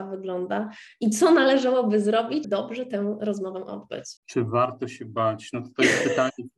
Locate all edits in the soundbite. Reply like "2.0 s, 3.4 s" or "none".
2.4 s, 4.2 s